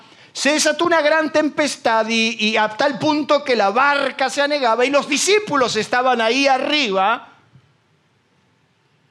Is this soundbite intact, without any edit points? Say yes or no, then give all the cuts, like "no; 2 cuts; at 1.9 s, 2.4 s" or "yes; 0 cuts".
yes; 0 cuts